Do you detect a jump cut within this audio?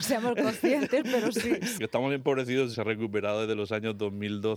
yes; 2 cuts; at 1.8 s, 2.7 s

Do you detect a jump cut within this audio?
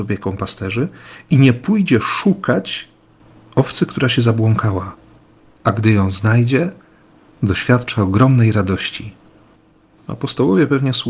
no; 0 cuts

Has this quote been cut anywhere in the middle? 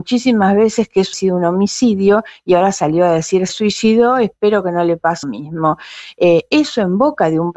yes; 3 cuts; at 1.1 s, 3.5 s, 5.2 s

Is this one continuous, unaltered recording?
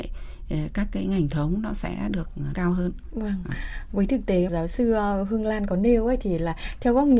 no; 3 cuts; at 1.3 s, 2.5 s, 4.5 s

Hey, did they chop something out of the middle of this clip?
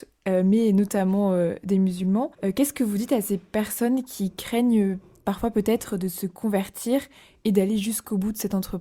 yes; 1 cut; at 2.3 s

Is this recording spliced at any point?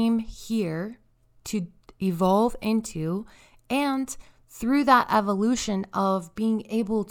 no; 0 cuts

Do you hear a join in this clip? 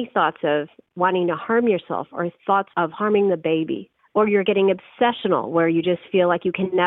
yes; 1 cut; at 4.0 s

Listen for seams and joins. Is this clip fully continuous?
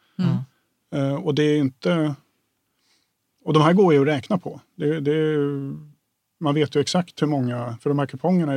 yes; 0 cuts

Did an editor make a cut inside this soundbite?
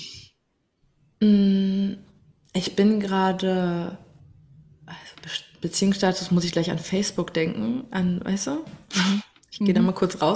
no; 0 cuts

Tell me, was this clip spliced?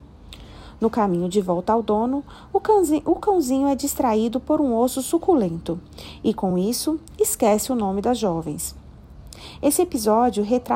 no; 0 cuts

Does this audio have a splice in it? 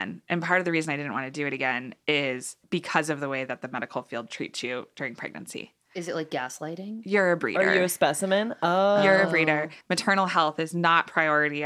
yes; 2 cuts; at 2.6 s, 9.8 s

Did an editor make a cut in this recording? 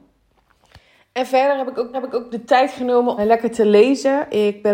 yes; 2 cuts; at 1.9 s, 3.2 s

